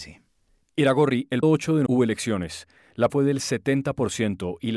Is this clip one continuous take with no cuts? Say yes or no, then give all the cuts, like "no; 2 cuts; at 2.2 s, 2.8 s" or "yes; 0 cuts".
no; 3 cuts; at 1.4 s, 1.9 s, 3.1 s